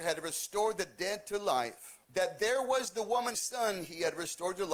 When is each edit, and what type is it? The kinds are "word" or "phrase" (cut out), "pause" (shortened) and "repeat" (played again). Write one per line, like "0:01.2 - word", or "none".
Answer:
0:02.0 - pause
0:03.3 - word